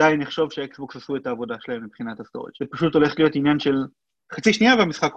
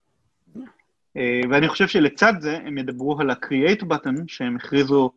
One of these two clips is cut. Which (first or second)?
first